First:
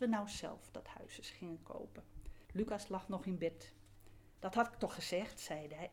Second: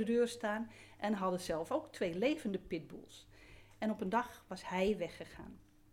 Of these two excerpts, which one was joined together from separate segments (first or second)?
first